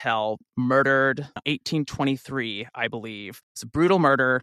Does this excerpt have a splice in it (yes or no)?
yes